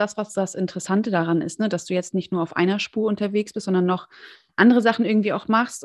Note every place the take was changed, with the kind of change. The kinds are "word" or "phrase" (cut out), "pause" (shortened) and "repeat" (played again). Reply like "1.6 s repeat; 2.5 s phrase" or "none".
none